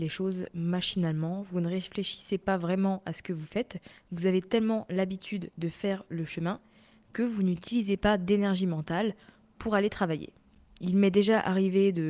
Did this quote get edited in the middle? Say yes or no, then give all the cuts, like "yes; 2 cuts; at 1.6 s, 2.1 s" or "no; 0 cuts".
no; 0 cuts